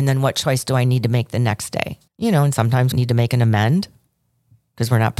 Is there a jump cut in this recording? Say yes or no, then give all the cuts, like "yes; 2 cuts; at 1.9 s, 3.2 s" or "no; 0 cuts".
yes; 2 cuts; at 2.1 s, 2.9 s